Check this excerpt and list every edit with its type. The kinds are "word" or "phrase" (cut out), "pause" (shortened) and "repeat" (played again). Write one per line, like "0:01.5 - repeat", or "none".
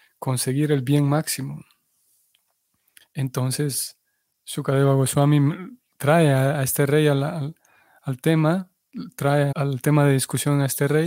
0:09.5 - word